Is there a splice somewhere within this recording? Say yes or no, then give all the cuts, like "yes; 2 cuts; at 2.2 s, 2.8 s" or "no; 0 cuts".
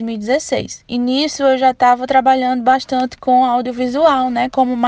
no; 0 cuts